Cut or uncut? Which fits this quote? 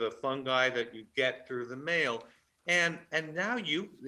uncut